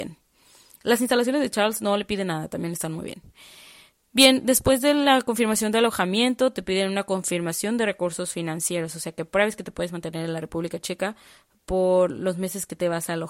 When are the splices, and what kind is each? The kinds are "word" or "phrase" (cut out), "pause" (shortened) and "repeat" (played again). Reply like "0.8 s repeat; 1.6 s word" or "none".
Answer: none